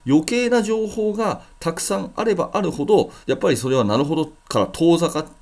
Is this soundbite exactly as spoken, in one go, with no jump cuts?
no; 2 cuts; at 3.2 s, 4.4 s

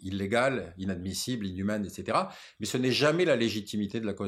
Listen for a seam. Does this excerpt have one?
no; 0 cuts

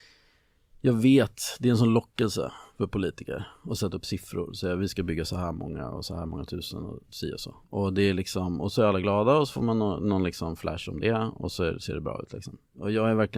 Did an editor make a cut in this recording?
yes; 1 cut; at 7.6 s

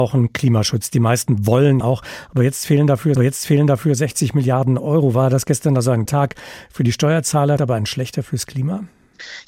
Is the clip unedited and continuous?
no; 4 cuts; at 1.8 s, 3.2 s, 6.1 s, 7.6 s

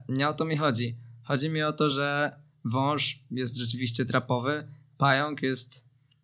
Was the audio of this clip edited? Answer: no; 0 cuts

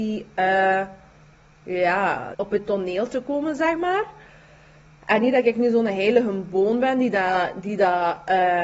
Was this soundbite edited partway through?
yes; 1 cut; at 2.3 s

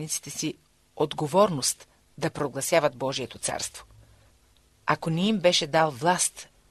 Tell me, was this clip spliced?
no; 0 cuts

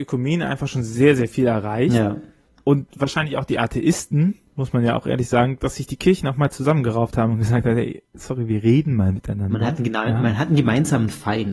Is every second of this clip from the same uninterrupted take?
yes; 0 cuts

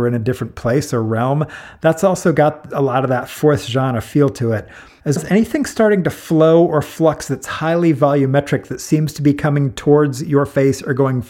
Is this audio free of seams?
no; 1 cut; at 5.2 s

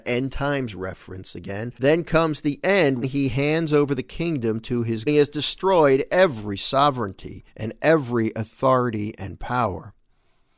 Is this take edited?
yes; 4 cuts; at 1.8 s, 3.0 s, 5.1 s, 7.5 s

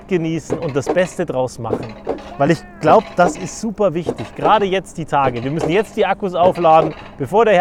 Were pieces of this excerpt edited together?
no; 0 cuts

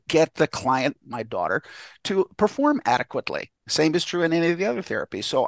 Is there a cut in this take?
yes; 1 cut; at 3.6 s

